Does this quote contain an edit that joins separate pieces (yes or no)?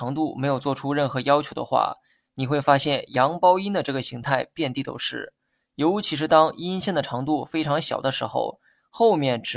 no